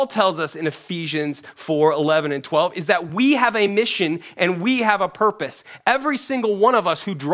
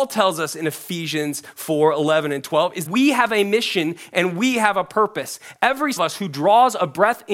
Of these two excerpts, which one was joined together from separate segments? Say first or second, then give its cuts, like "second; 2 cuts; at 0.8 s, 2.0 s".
second; 2 cuts; at 2.9 s, 6.0 s